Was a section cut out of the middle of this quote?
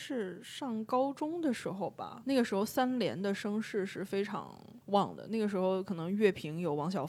yes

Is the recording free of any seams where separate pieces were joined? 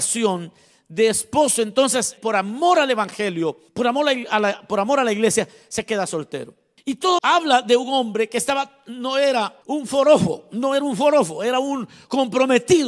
no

